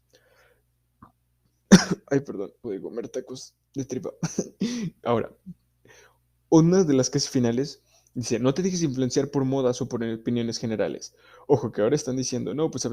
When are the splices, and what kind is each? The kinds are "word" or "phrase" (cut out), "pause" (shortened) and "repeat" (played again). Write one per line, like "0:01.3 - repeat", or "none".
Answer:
0:02.6 - word
0:05.0 - word